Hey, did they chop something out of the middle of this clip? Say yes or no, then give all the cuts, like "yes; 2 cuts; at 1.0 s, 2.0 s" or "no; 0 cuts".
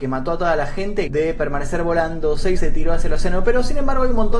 yes; 2 cuts; at 1.1 s, 2.6 s